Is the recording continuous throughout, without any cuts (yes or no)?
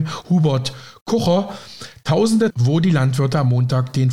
no